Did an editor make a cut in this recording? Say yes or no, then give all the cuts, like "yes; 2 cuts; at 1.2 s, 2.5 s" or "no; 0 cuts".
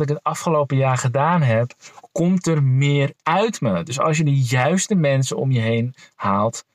no; 0 cuts